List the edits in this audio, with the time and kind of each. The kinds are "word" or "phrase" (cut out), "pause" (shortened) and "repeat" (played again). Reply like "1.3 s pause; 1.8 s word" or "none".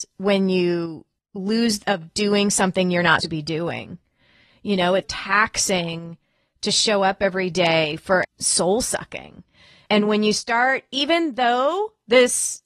1.8 s word; 3.2 s word; 5.0 s word; 8.2 s phrase

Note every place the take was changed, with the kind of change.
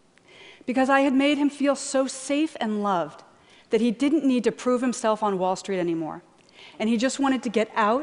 none

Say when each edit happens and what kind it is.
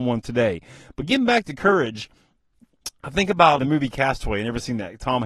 3.6 s word

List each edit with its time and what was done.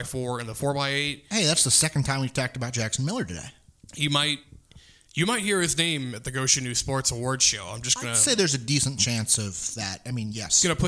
none

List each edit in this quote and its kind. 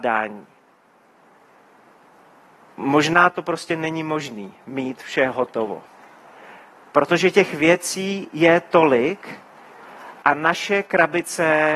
none

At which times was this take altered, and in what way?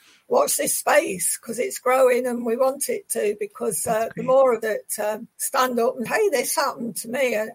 4.6 s word; 5.3 s pause; 6.1 s word

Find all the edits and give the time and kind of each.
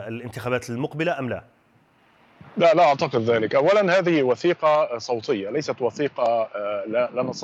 none

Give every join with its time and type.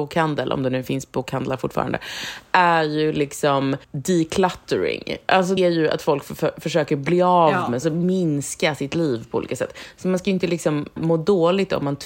3.8 s pause; 5.6 s word; 7.8 s phrase; 11.0 s word

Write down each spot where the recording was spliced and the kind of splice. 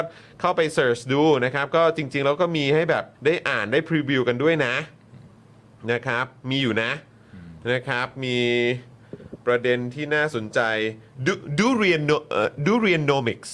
3.1 s pause

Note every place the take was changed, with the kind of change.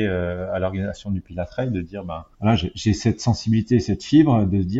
2.3 s pause

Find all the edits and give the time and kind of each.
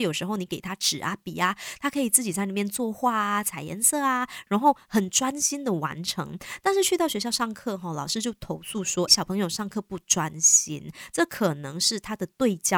9.1 s word

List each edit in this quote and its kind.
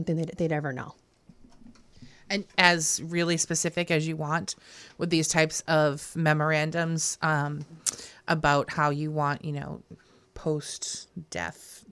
2.5 s phrase

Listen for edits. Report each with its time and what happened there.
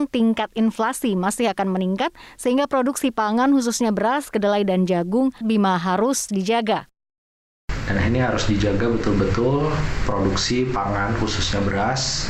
5.4 s word; 6.3 s word

